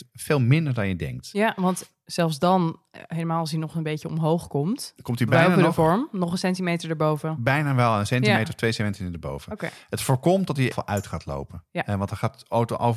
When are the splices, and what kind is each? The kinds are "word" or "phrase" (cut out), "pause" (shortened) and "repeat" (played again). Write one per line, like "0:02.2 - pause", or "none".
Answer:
0:10.7 - phrase